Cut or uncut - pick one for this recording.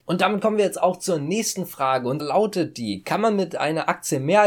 cut